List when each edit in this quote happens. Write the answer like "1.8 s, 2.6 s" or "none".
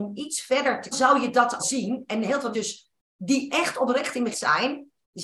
0.9 s, 1.6 s, 2.5 s, 4.3 s